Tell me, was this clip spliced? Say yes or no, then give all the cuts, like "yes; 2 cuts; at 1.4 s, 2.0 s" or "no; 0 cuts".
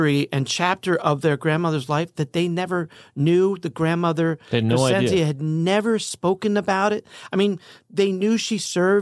no; 0 cuts